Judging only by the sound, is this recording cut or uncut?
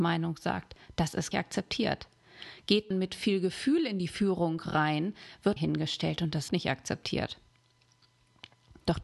cut